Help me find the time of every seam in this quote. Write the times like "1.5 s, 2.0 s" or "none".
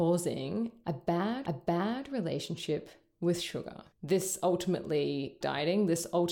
1.5 s, 3.9 s, 5.4 s